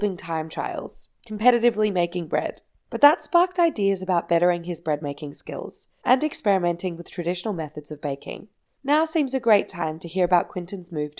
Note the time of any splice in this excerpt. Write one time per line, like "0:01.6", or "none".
none